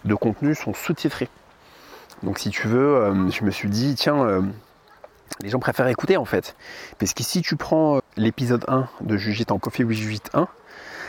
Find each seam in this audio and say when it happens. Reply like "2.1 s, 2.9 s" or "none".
8.0 s, 9.6 s